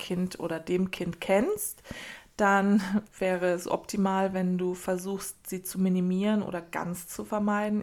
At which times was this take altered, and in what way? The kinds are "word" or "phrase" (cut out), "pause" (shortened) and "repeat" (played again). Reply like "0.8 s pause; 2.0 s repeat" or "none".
none